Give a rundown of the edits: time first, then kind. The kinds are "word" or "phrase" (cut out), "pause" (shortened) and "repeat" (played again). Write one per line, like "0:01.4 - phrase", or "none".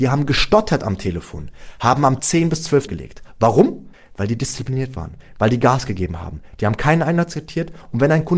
0:02.2 - word
0:02.9 - word
0:03.9 - pause